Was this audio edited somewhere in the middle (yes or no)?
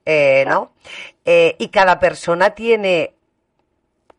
no